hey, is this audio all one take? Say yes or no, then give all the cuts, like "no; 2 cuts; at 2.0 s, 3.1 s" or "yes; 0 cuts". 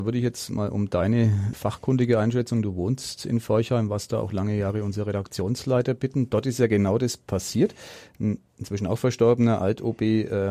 no; 2 cuts; at 1.5 s, 8.5 s